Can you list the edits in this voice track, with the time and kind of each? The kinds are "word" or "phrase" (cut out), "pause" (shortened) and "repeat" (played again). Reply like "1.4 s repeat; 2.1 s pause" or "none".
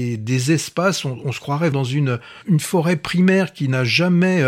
1.7 s word; 2.4 s word